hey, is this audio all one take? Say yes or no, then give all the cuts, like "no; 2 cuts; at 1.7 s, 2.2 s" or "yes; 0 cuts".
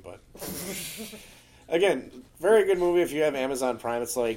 no; 1 cut; at 2.3 s